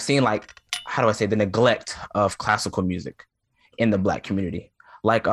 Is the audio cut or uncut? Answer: uncut